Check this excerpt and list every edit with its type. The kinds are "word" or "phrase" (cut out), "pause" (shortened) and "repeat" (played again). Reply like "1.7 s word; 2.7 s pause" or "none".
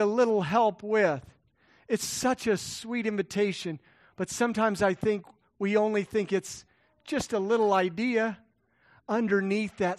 none

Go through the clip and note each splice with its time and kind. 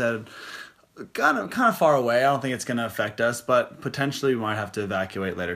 none

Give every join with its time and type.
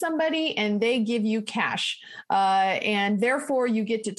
none

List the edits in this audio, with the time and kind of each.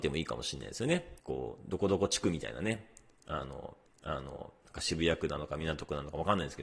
1.2 s pause; 3.9 s repeat

